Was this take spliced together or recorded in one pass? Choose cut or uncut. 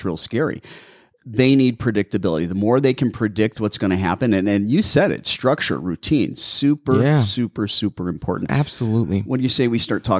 uncut